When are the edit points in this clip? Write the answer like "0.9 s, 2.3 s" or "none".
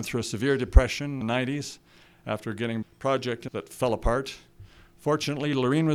1.2 s, 2.8 s, 3.5 s